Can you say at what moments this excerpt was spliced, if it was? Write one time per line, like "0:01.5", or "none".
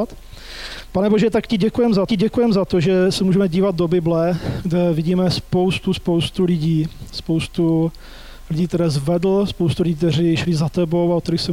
0:02.1